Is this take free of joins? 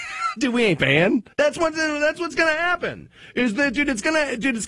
no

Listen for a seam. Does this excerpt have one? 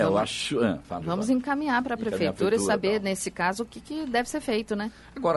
no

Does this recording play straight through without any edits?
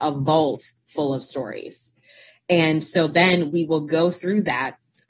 yes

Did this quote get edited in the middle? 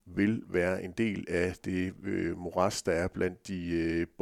no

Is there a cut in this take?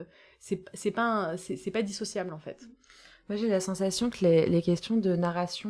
no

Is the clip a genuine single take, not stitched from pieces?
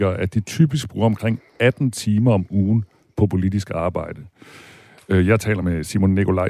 yes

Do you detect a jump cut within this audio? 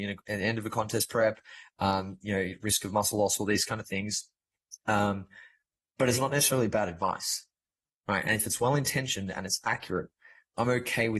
no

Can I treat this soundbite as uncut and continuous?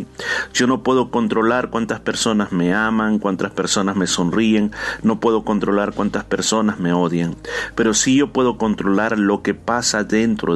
yes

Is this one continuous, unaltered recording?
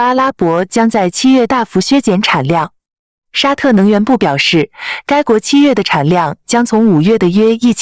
yes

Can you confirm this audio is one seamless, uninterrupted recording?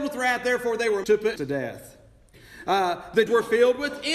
no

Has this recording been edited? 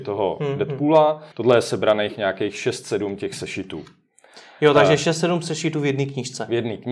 yes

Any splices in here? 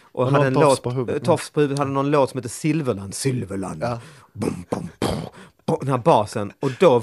no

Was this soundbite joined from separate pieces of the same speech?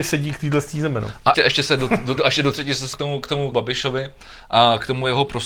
yes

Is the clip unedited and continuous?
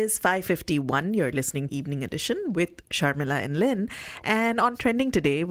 no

